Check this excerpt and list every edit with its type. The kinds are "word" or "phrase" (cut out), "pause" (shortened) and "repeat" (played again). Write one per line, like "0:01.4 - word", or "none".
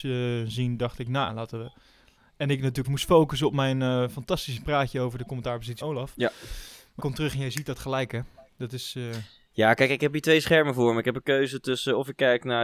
0:02.8 - word
0:05.8 - word
0:07.0 - word